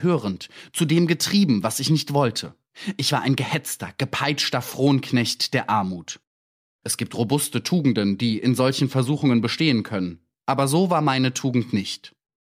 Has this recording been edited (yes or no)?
no